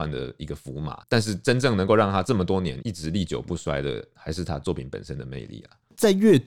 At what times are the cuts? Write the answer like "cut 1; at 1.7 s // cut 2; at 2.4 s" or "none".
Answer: cut 1; at 1.0 s